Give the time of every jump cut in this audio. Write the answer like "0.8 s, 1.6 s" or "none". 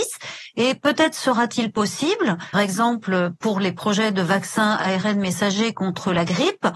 2.5 s